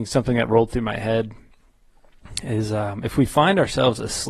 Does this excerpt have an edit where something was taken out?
no; 0 cuts

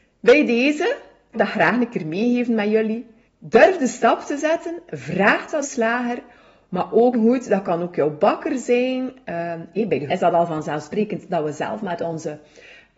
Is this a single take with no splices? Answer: no; 5 cuts; at 1.3 s, 3.3 s, 5.6 s, 7.1 s, 10.1 s

